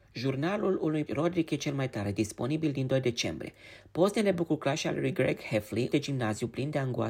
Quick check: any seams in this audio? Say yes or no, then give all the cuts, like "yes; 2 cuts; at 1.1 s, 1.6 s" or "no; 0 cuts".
yes; 2 cuts; at 1.1 s, 5.9 s